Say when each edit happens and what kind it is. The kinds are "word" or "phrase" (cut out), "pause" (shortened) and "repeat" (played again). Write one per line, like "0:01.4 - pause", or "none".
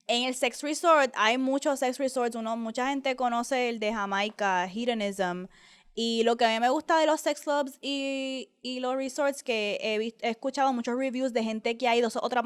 none